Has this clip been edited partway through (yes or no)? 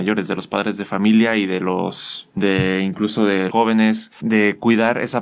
yes